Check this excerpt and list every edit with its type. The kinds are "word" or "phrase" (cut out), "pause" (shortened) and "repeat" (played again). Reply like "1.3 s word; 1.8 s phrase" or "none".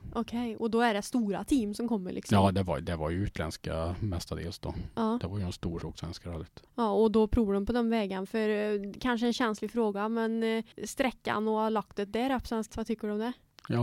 5.8 s phrase; 6.7 s pause; 10.7 s pause; 12.7 s word